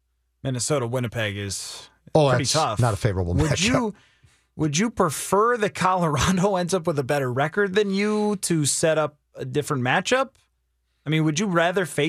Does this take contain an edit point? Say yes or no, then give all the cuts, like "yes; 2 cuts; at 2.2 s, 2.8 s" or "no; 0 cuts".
no; 0 cuts